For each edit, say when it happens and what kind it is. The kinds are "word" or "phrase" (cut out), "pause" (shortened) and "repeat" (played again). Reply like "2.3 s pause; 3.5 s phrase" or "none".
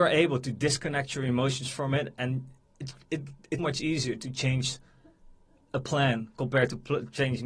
3.6 s word